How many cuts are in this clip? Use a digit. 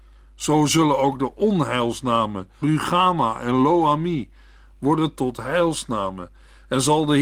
2